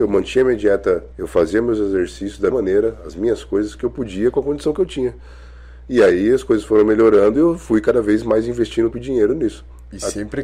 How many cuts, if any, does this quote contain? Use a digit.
3